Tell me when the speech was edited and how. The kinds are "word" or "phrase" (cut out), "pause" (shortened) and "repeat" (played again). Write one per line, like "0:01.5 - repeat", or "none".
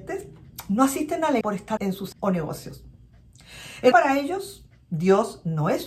0:01.4 - word
0:01.8 - word
0:02.1 - word
0:03.9 - word